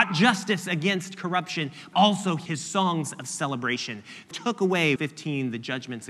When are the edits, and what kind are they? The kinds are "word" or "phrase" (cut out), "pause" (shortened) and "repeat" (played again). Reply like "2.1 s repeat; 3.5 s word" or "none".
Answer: 1.9 s word; 2.5 s word; 4.3 s word; 5.0 s word